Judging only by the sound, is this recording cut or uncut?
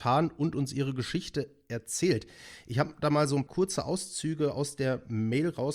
cut